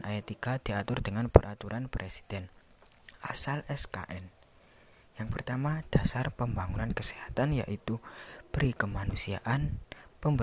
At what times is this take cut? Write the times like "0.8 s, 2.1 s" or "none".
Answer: none